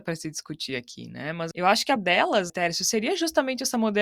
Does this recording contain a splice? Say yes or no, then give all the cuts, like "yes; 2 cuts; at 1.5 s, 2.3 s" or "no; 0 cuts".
yes; 3 cuts; at 1.5 s, 2.0 s, 2.5 s